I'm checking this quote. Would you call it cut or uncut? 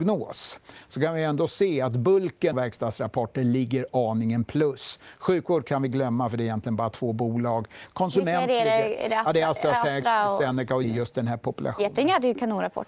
cut